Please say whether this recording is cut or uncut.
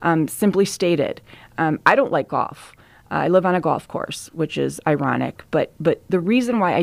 uncut